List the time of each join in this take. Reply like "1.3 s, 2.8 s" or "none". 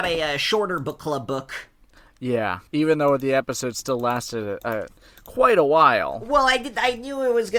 2.7 s

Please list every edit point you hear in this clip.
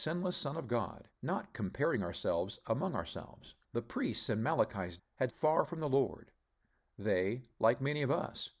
1.2 s, 3.6 s, 5.0 s, 5.3 s

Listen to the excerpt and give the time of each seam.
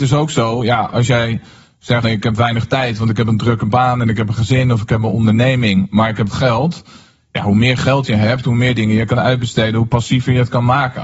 2.0 s, 6.3 s

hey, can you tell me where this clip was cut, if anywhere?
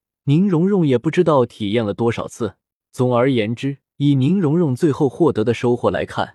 2.8 s, 3.9 s

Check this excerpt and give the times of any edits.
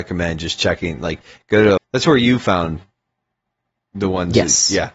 1.8 s

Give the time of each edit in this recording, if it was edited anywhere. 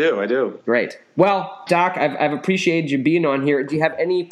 1.7 s

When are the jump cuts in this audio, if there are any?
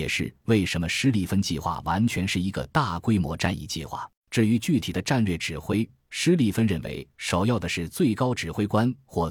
4.2 s

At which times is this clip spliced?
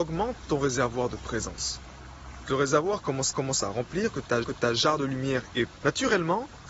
2.5 s, 3.3 s, 4.4 s, 5.8 s

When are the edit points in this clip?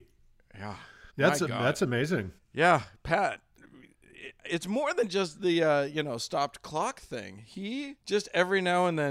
1.1 s, 2.4 s, 8.0 s

